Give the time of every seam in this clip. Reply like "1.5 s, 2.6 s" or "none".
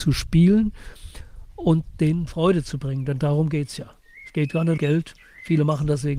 4.8 s